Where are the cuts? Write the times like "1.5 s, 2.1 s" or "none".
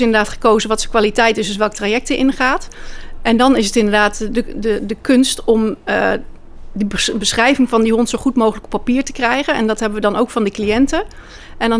none